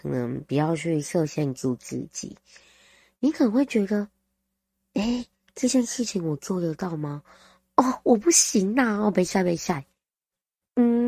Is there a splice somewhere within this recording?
no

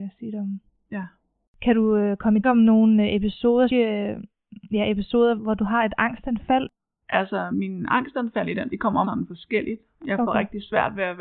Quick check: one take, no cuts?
no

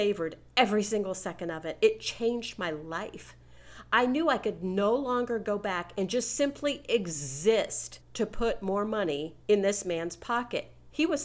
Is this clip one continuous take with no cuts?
no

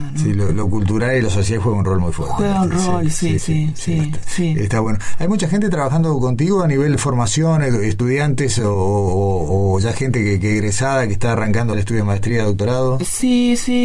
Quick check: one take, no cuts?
no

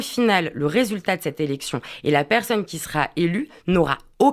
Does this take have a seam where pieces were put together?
no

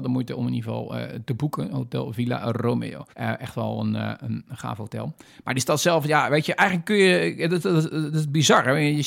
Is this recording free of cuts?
no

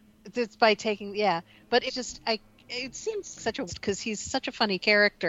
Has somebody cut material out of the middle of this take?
yes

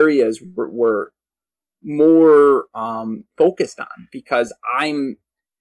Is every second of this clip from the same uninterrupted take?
yes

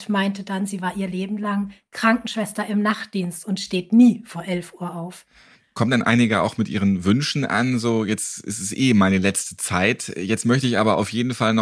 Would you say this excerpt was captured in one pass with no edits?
yes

